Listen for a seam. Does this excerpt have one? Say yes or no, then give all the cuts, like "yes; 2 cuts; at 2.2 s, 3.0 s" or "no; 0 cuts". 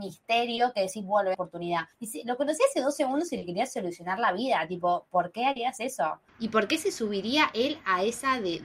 yes; 3 cuts; at 1.3 s, 1.9 s, 6.3 s